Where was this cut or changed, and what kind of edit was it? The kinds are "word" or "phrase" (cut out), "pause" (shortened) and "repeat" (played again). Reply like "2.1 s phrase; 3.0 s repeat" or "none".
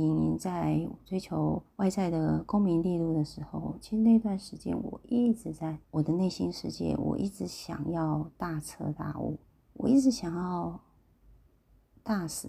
1.7 s pause; 5.8 s pause; 9.4 s pause

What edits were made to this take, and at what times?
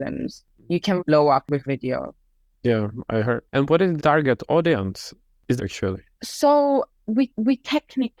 1.0 s word; 1.7 s word; 3.5 s pause; 4.0 s word; 5.6 s phrase; 6.1 s pause; 7.3 s repeat

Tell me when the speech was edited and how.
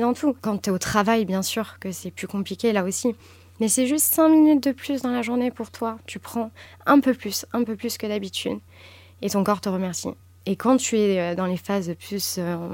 none

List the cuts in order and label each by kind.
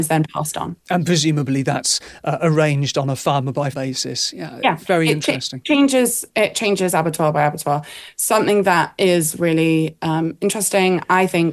3.7 s phrase; 5.6 s word

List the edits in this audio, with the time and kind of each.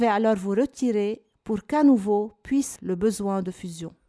2.8 s word

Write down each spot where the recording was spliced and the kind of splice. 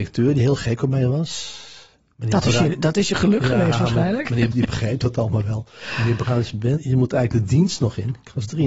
4.5 s word; 6.8 s word

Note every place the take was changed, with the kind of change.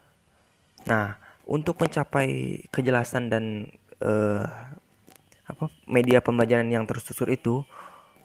none

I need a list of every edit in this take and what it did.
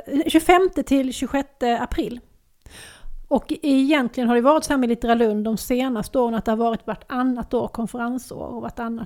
none

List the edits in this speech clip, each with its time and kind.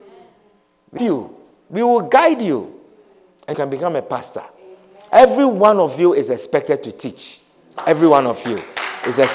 1.0 s phrase; 3.5 s word

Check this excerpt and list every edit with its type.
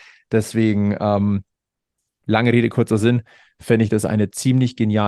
none

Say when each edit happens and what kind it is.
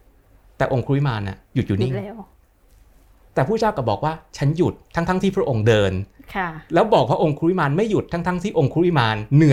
1.4 s pause

